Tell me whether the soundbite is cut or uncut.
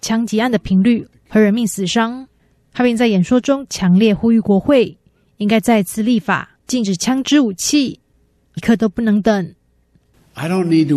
cut